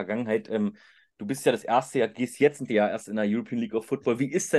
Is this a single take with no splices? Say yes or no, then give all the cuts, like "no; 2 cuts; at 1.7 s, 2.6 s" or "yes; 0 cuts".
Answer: no; 1 cut; at 2.7 s